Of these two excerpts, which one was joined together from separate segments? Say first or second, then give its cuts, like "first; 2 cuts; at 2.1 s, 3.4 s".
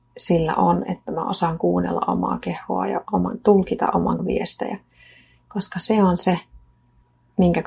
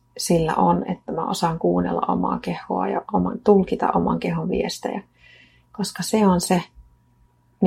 first; 1 cut; at 4.2 s